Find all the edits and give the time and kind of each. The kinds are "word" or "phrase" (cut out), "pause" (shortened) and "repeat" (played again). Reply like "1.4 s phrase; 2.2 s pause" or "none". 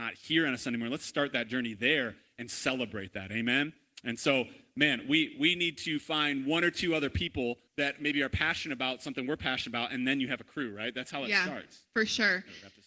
7.7 s pause